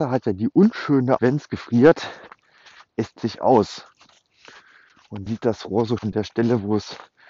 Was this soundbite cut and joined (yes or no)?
yes